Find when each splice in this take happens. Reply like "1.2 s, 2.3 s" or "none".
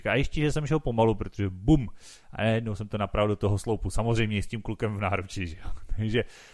none